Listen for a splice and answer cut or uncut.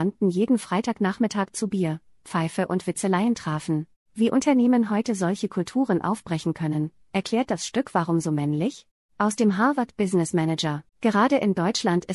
cut